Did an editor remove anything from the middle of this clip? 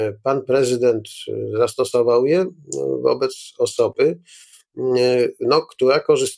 no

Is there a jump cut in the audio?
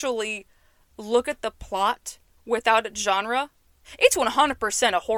no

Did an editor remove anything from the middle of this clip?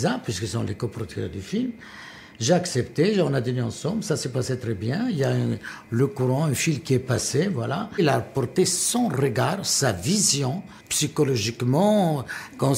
yes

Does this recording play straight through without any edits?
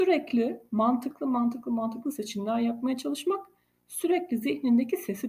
yes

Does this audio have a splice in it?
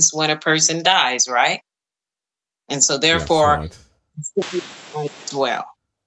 no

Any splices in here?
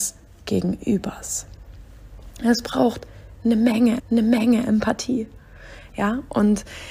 yes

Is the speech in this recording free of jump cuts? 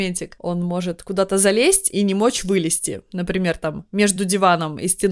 yes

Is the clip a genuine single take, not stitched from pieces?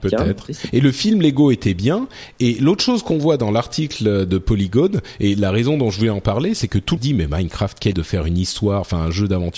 no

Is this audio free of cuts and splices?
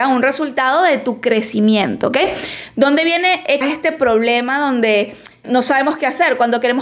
no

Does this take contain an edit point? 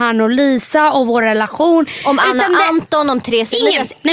no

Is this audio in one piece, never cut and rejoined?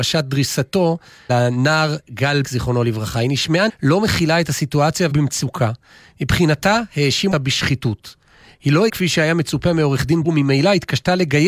no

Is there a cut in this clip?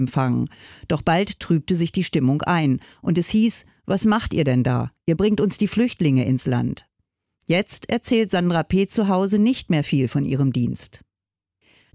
no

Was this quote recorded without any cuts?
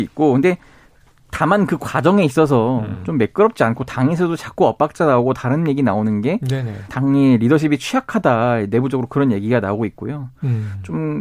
no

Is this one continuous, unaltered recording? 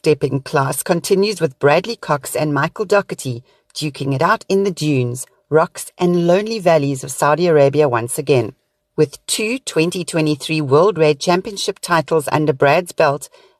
no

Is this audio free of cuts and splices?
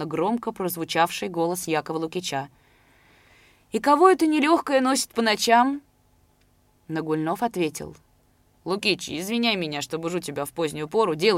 yes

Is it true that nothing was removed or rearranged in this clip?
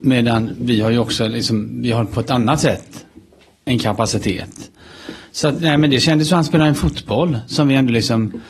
yes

